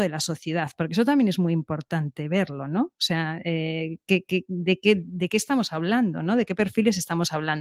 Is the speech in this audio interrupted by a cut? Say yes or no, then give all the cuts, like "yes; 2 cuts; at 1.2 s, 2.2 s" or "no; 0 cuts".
no; 0 cuts